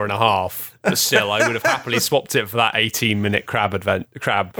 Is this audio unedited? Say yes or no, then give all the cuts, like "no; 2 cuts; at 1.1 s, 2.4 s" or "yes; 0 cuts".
yes; 0 cuts